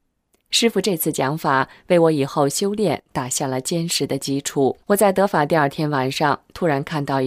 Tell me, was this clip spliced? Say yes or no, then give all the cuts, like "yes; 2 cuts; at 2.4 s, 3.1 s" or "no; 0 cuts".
yes; 1 cut; at 4.8 s